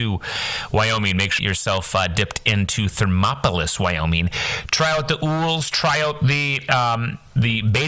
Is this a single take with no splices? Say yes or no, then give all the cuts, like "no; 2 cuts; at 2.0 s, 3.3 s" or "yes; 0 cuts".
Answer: no; 1 cut; at 1.4 s